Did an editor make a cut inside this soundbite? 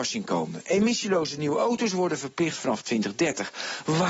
no; 0 cuts

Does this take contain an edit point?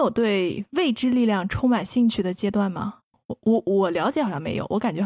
no; 0 cuts

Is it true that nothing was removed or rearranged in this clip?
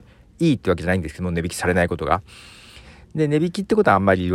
yes; 0 cuts

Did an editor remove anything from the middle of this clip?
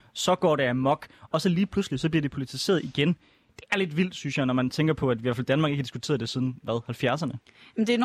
no; 0 cuts

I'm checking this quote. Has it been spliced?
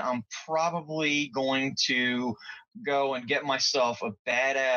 no; 0 cuts

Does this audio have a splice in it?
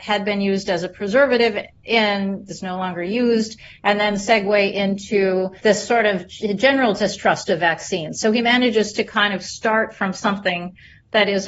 yes; 2 cuts; at 2.5 s, 5.6 s

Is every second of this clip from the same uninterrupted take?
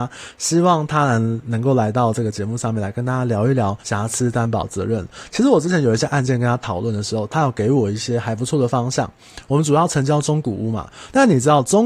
no; 1 cut; at 3.8 s

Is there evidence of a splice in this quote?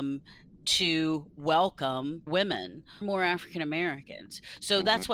yes; 2 cuts; at 2.3 s, 3.0 s

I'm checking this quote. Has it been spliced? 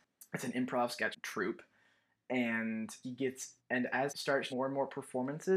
yes; 5 cuts; at 1.1 s, 3.0 s, 3.6 s, 4.1 s, 4.5 s

